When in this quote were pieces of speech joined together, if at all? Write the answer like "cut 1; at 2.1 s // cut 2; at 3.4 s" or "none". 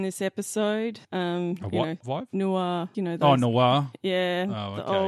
cut 1; at 1.0 s // cut 2; at 2.0 s // cut 3; at 2.9 s